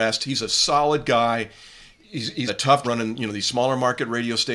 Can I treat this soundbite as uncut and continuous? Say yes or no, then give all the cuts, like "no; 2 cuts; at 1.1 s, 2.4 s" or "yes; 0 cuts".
no; 2 cuts; at 2.5 s, 2.8 s